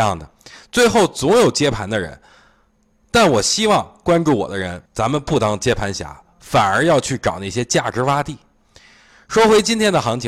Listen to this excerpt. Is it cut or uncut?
cut